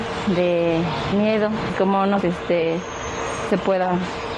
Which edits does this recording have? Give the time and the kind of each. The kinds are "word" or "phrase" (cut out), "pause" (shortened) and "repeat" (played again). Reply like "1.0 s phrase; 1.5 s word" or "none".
1.1 s word; 1.7 s word; 2.2 s word; 3.5 s word